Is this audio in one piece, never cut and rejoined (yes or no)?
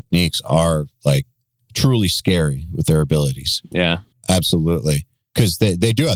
yes